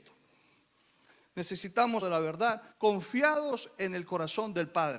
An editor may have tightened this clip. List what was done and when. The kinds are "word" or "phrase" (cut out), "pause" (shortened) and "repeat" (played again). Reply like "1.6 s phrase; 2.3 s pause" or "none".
2.0 s phrase; 2.7 s pause